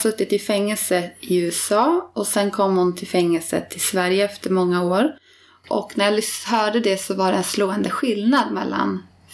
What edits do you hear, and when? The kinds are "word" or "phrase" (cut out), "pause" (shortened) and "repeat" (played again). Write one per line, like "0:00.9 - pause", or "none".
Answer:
none